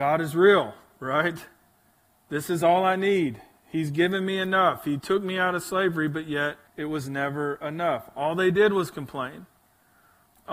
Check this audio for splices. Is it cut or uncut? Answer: cut